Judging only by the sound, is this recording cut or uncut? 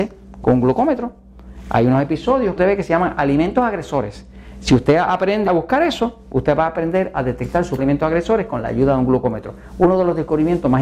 cut